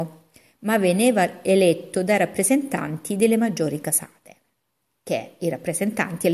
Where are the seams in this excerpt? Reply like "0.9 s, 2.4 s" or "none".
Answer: none